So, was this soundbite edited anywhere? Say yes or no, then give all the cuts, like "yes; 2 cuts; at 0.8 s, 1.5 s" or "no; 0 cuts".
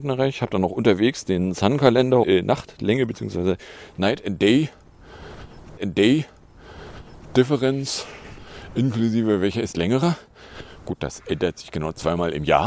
yes; 3 cuts; at 2.2 s, 5.8 s, 9.7 s